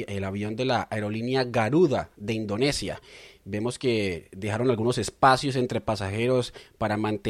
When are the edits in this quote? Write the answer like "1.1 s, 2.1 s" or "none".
none